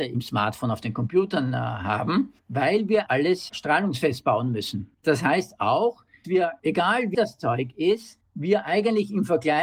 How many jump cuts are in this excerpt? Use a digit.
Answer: 4